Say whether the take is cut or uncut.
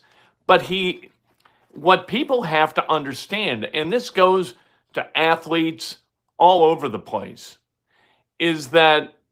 uncut